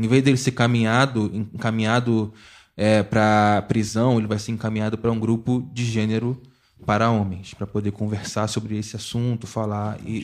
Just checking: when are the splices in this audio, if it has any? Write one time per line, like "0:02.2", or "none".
none